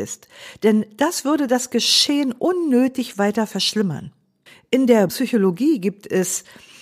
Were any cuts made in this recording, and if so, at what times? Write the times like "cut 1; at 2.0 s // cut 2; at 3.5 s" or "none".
cut 1; at 4.5 s // cut 2; at 5.1 s